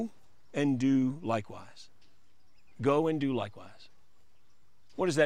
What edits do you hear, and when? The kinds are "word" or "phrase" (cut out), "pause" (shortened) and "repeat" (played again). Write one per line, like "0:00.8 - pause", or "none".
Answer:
none